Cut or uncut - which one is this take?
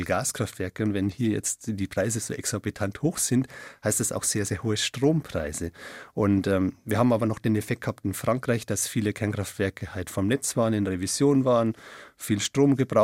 uncut